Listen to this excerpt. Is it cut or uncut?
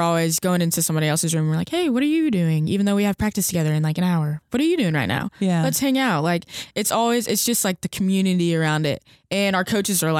uncut